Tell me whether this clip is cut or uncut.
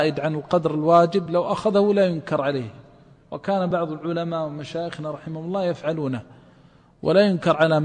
uncut